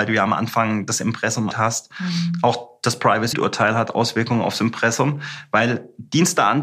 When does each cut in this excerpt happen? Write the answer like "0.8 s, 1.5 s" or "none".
1.5 s, 3.3 s